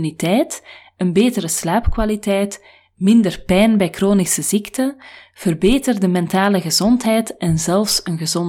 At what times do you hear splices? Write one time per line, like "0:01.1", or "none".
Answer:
none